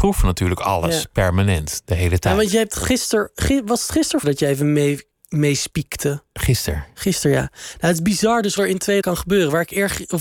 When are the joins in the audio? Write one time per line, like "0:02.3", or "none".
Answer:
0:04.2
0:08.6
0:09.0